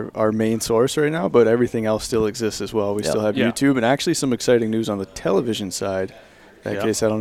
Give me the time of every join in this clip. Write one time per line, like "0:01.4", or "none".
none